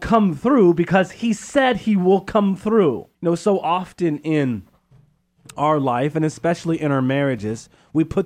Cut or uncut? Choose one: cut